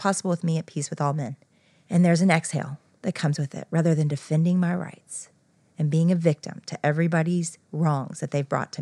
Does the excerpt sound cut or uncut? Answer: uncut